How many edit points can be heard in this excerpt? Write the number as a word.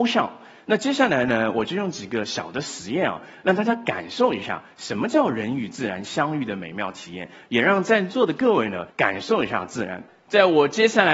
one